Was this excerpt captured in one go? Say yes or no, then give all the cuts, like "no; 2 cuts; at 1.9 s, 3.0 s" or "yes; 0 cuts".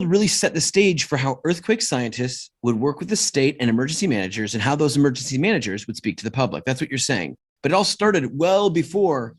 yes; 0 cuts